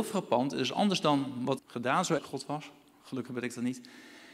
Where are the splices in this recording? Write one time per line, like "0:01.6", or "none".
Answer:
0:01.6
0:02.2